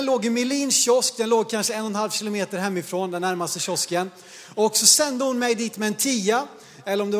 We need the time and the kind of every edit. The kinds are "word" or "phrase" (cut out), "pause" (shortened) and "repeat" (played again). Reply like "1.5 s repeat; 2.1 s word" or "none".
none